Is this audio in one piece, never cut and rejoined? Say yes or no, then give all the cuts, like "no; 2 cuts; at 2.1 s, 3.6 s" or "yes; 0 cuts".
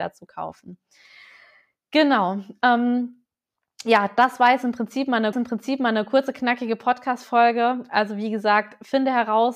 no; 1 cut; at 5.3 s